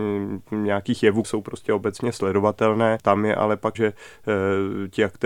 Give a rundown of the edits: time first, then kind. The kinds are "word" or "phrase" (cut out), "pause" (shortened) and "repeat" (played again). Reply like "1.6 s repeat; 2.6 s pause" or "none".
1.2 s word; 3.7 s word